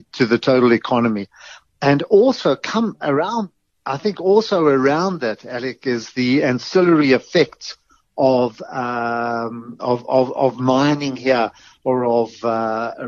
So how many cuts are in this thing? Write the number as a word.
one